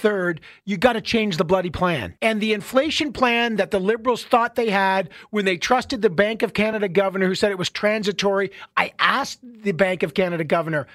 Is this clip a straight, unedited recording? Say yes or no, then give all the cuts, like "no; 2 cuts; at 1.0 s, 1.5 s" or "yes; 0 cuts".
no; 1 cut; at 2.2 s